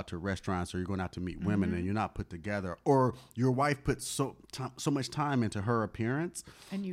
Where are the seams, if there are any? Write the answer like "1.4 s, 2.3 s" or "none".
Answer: none